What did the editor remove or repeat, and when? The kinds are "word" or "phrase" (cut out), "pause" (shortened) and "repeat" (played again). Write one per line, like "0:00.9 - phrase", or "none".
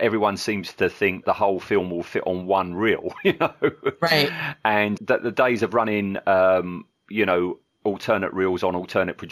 0:01.2 - word
0:05.0 - word